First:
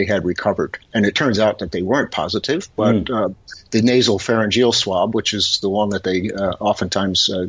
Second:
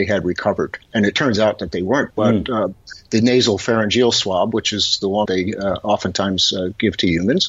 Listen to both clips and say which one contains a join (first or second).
second